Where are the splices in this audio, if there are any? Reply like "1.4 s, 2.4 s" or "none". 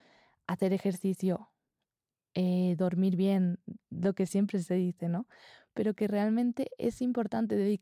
none